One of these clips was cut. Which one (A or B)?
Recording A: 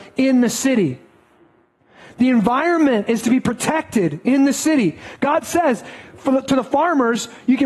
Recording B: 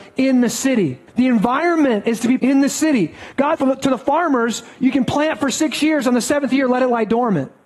B